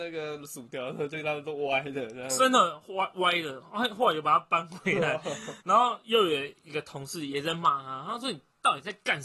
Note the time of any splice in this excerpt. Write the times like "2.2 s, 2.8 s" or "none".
5.6 s